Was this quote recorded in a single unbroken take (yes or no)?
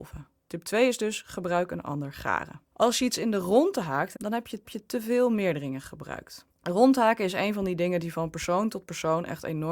no